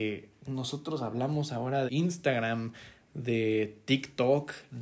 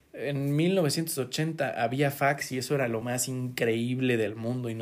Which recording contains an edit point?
first; 1 cut; at 1.9 s

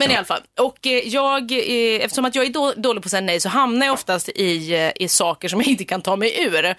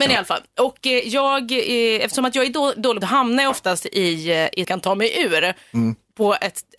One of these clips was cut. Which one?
second; 2 cuts; at 3.0 s, 4.6 s

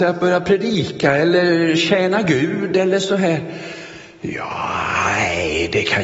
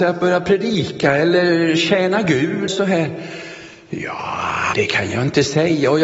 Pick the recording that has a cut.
second; 2 cuts; at 2.7 s, 4.7 s

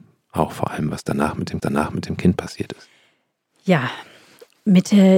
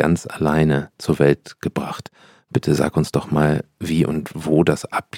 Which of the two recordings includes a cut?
first; 1 cut; at 1.6 s

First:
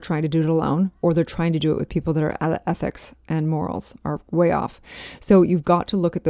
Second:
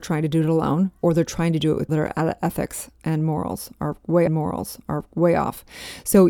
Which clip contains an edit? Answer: second; 2 cuts; at 1.9 s, 4.3 s

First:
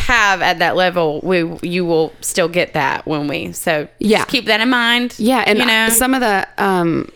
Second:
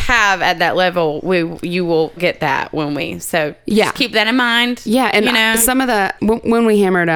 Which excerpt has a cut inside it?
second; 2 cuts; at 2.2 s, 6.2 s

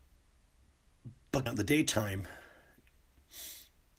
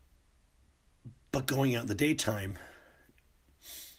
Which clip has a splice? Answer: first; 1 cut; at 1.5 s

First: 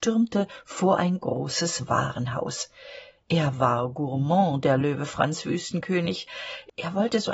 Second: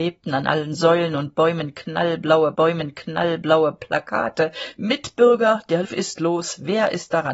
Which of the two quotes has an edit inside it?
second; 2 cuts; at 2.5 s, 5.8 s

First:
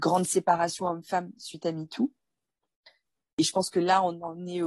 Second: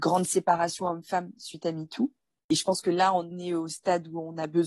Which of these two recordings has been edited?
second; 2 cuts; at 2.4 s, 3.3 s

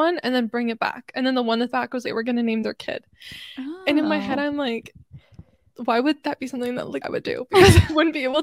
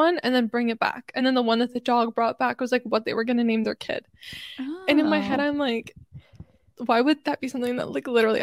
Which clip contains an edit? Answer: first; 3 cuts; at 1.7 s, 2.0 s, 7.0 s

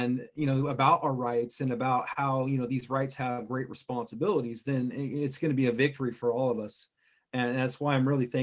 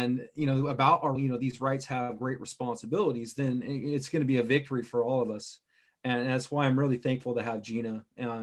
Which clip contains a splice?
second; 1 cut; at 1.2 s

